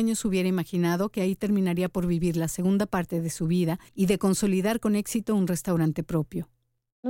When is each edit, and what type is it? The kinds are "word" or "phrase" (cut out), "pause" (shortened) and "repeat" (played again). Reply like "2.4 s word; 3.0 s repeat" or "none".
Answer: 3.9 s pause